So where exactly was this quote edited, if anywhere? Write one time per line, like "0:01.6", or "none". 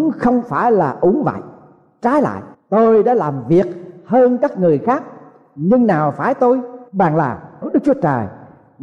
0:02.5
0:06.9
0:07.6